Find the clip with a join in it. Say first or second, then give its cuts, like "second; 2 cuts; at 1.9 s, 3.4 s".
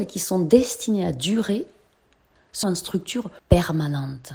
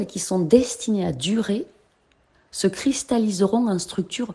first; 2 cuts; at 2.6 s, 3.4 s